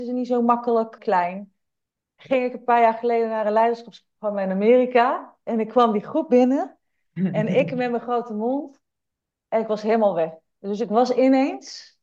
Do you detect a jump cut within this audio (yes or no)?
yes